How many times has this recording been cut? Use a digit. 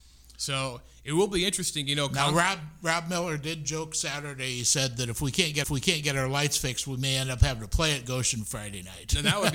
1